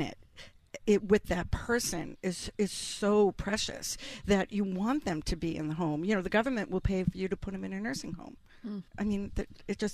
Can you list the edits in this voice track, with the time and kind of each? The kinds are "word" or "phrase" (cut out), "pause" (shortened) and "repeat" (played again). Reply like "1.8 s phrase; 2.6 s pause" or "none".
8.9 s pause